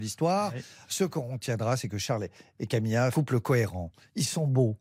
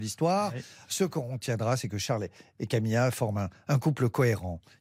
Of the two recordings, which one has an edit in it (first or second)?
first